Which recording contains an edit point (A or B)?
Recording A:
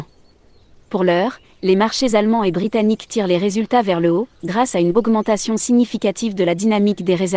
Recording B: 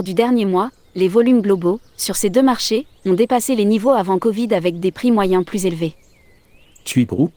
A